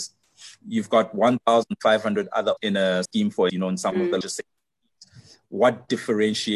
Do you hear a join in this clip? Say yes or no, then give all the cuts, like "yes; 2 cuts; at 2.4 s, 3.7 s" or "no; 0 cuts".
yes; 4 cuts; at 2.6 s, 3.1 s, 3.5 s, 4.2 s